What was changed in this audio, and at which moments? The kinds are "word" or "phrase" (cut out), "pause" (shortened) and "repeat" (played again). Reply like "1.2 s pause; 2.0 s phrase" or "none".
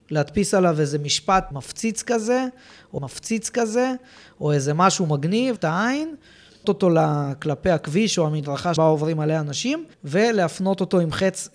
1.5 s word; 3.0 s repeat; 5.6 s word; 6.6 s word; 8.8 s word; 9.9 s pause